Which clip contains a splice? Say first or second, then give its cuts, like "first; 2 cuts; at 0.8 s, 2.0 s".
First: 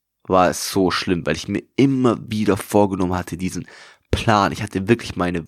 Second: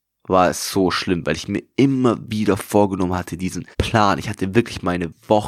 second; 1 cut; at 3.7 s